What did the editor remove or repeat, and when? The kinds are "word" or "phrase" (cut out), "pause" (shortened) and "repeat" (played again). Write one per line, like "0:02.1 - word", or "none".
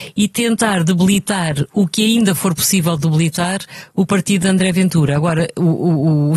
none